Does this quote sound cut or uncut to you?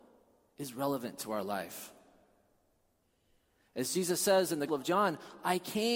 cut